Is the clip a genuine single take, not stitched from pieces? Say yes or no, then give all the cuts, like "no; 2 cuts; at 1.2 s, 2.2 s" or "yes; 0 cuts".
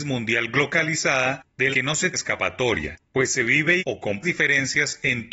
no; 4 cuts; at 1.7 s, 2.1 s, 3.8 s, 4.2 s